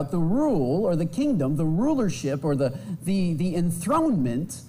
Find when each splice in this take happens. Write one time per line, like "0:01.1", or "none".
none

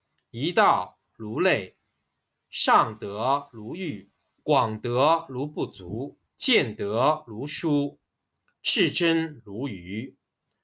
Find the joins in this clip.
0:04.4
0:06.3

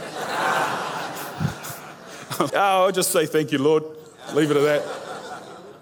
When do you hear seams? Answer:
0:02.5

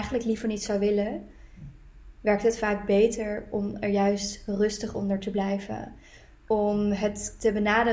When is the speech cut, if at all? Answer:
none

